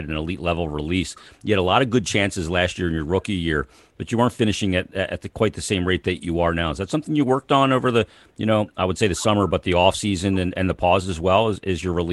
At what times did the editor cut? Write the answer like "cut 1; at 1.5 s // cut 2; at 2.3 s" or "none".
none